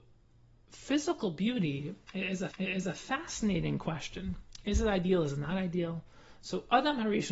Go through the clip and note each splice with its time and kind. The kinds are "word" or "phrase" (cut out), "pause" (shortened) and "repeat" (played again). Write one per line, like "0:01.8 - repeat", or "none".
0:02.5 - repeat